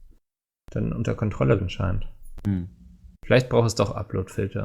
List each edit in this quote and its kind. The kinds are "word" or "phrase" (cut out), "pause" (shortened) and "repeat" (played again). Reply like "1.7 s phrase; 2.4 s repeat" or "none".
1.6 s word; 3.2 s pause